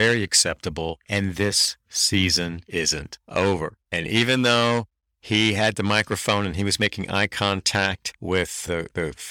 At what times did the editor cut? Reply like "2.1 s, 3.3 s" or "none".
none